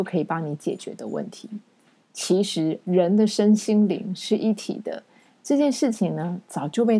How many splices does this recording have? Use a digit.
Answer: 0